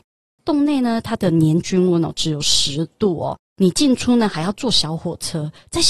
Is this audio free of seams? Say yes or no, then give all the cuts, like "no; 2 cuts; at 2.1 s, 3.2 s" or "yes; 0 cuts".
no; 1 cut; at 3.5 s